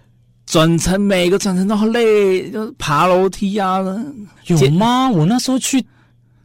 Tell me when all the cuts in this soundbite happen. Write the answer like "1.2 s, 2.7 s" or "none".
4.4 s